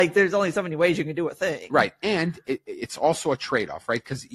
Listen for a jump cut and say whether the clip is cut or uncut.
uncut